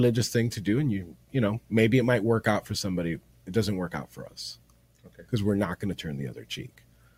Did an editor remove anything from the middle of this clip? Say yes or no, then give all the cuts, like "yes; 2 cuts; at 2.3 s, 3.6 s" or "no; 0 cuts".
no; 0 cuts